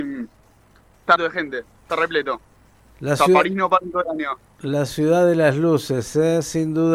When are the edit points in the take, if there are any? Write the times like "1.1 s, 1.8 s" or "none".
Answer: 1.2 s

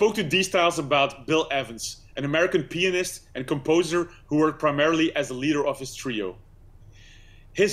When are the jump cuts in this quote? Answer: none

